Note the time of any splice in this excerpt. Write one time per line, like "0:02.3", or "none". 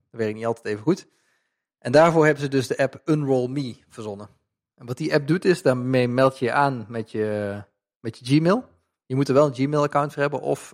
none

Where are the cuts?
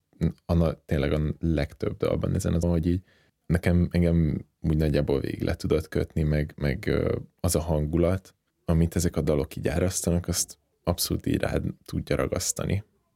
0:02.6
0:03.3
0:08.5
0:10.7

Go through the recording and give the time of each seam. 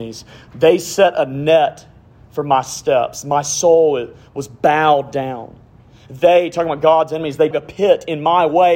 0:07.5

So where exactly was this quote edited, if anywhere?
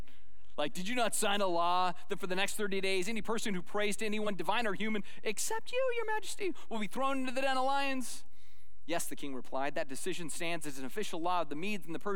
none

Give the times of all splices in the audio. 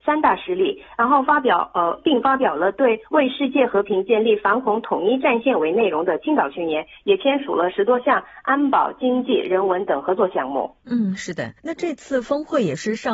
0:11.6

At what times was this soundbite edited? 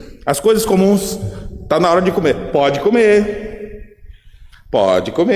none

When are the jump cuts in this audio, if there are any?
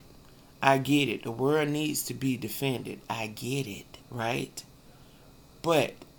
0:04.0

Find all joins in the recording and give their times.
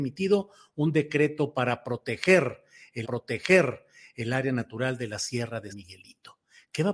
0:03.0
0:05.7

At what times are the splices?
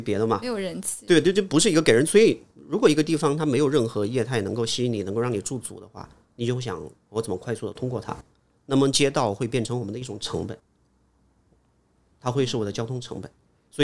none

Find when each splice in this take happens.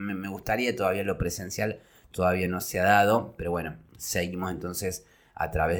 none

